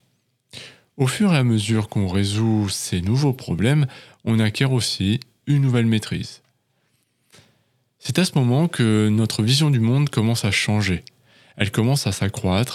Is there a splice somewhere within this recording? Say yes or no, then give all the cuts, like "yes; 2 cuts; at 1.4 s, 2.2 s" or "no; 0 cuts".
no; 0 cuts